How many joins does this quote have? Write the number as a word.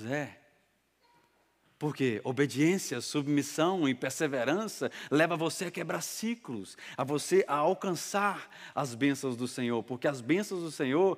zero